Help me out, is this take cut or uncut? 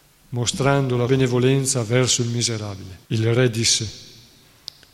cut